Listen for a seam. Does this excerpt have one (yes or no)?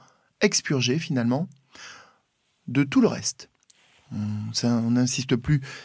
no